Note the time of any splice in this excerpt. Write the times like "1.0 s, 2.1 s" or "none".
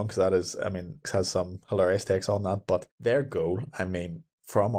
1.0 s, 2.9 s